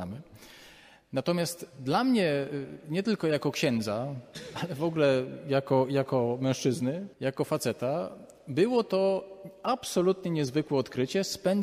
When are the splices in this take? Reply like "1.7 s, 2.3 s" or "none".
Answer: 7.1 s